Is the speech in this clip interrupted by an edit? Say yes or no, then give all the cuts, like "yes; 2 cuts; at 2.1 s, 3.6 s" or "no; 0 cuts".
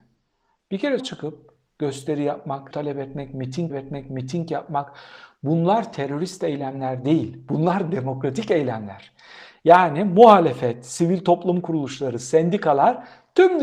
yes; 3 cuts; at 1.0 s, 2.7 s, 3.7 s